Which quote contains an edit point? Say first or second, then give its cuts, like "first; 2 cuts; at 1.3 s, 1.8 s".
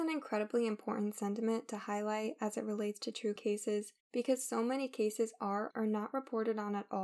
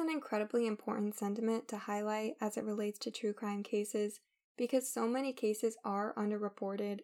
first; 3 cuts; at 3.4 s, 4.0 s, 5.7 s